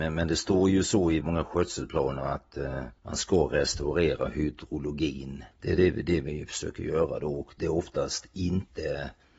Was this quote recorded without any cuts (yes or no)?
no